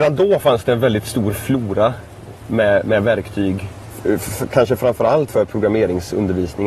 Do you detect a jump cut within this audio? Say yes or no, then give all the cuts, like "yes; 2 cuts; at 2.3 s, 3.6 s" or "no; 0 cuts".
yes; 1 cut; at 5.3 s